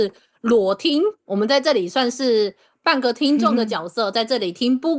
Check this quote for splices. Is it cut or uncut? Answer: uncut